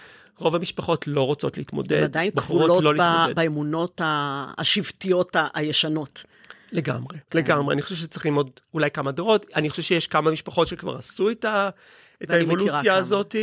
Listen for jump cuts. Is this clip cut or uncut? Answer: cut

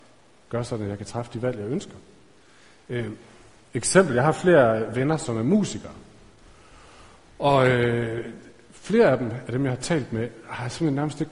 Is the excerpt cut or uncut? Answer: uncut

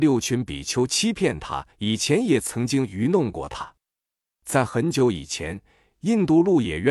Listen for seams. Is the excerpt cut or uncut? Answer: cut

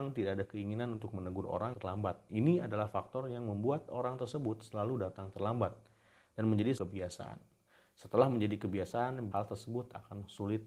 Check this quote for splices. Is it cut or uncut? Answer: cut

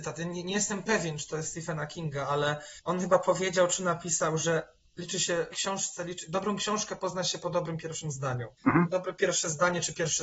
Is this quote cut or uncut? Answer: cut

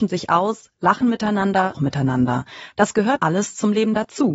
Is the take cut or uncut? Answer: cut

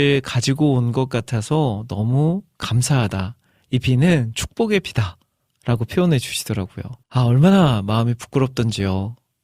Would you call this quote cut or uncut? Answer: cut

